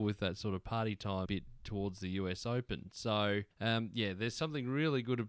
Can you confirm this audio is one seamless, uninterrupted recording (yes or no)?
no